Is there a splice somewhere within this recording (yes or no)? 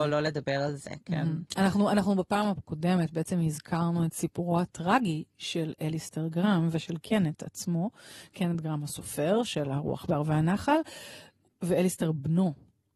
no